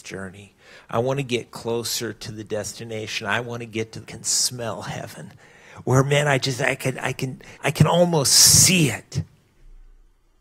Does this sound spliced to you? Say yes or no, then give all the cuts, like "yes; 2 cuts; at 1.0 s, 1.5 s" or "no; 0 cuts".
yes; 2 cuts; at 4.0 s, 7.5 s